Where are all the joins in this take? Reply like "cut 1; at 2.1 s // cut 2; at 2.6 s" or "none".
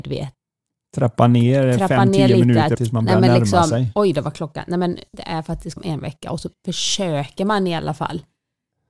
cut 1; at 2.7 s // cut 2; at 5.8 s